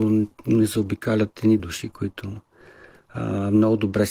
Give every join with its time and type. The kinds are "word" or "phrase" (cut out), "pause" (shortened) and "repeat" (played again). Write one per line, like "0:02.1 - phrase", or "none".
0:01.6 - word